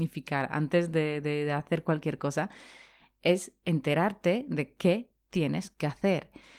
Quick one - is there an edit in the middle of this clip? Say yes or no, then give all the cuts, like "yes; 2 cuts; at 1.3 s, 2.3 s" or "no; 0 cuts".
no; 0 cuts